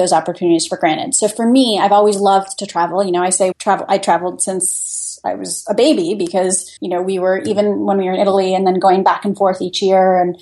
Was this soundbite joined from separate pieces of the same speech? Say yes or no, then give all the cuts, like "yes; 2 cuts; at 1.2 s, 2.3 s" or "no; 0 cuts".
yes; 2 cuts; at 3.5 s, 6.8 s